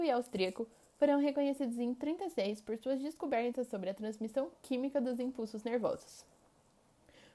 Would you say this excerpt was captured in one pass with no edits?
yes; 0 cuts

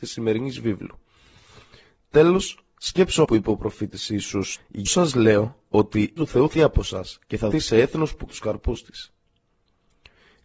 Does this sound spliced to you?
yes; 7 cuts; at 3.2 s, 4.5 s, 4.9 s, 6.2 s, 6.5 s, 7.5 s, 8.3 s

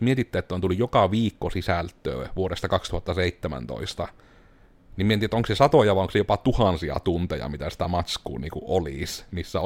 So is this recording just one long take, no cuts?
yes; 0 cuts

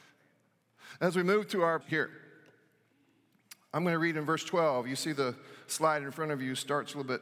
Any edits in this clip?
yes; 1 cut; at 1.8 s

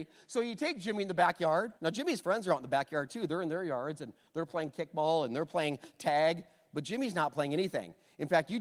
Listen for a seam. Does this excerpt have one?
yes; 1 cut; at 1.8 s

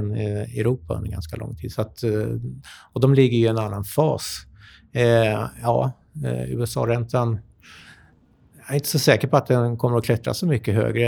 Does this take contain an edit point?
no; 0 cuts

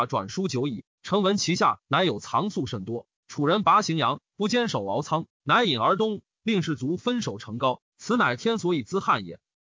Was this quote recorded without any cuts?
no; 1 cut; at 3.2 s

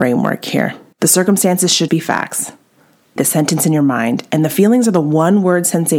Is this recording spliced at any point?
yes; 3 cuts; at 0.9 s, 1.9 s, 3.2 s

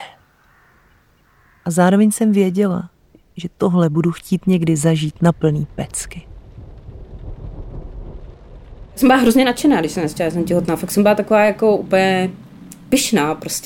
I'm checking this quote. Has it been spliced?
no; 0 cuts

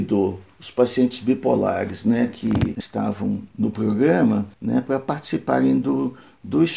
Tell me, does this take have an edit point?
yes; 1 cut; at 4.5 s

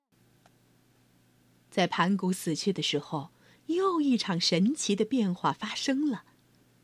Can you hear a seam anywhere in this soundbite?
no; 0 cuts

